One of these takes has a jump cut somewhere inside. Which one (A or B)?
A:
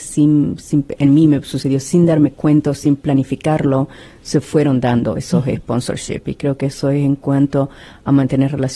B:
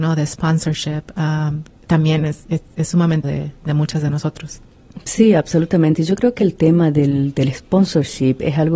B